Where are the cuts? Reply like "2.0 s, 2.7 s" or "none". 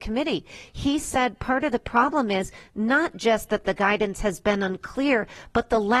none